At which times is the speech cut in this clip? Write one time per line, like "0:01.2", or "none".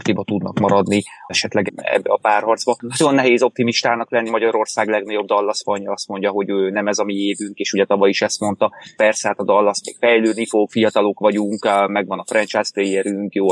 0:01.3
0:01.7
0:04.3
0:09.0